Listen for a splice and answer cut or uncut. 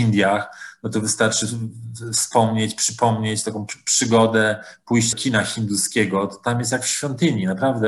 cut